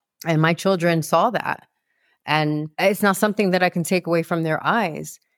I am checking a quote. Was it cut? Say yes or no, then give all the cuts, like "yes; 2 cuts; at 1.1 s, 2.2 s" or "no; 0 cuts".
yes; 1 cut; at 2.7 s